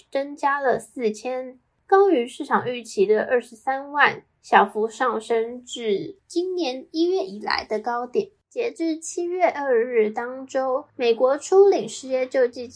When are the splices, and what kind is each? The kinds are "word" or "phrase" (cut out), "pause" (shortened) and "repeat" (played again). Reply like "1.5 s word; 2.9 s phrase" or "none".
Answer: 10.9 s pause